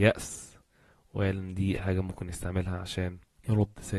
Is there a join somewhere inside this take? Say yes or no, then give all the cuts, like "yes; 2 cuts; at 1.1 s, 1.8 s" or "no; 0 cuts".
yes; 1 cut; at 1.7 s